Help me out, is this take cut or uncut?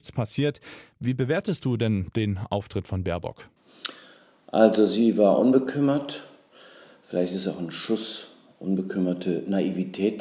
uncut